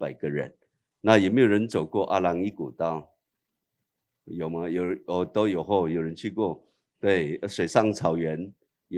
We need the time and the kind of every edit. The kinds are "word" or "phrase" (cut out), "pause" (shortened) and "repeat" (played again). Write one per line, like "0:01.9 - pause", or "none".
none